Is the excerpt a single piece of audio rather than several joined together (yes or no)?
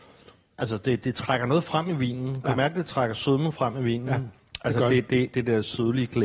no